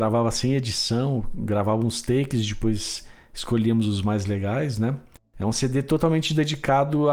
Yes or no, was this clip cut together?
no